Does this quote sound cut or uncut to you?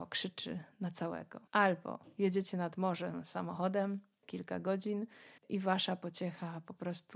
cut